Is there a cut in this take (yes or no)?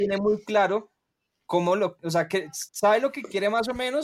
yes